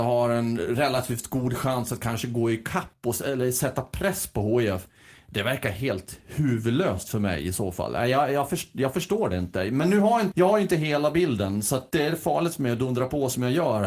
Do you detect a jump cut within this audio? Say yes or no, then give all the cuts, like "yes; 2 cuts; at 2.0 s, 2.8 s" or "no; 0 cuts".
yes; 2 cuts; at 10.3 s, 11.9 s